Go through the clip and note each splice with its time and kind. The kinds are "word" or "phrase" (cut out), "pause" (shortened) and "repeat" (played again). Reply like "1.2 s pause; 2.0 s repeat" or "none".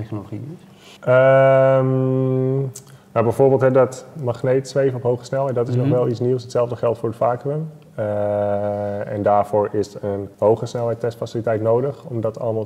1.0 s pause; 10.3 s pause